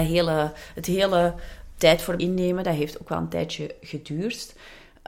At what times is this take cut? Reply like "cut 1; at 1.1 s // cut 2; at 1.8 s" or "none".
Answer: cut 1; at 1.8 s // cut 2; at 2.2 s